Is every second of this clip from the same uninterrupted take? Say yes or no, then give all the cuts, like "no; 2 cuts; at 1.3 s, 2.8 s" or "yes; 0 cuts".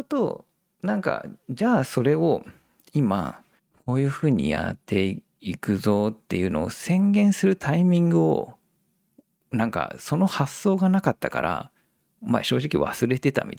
no; 1 cut; at 3.6 s